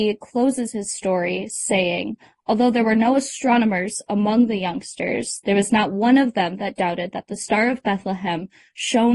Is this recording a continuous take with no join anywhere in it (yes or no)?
yes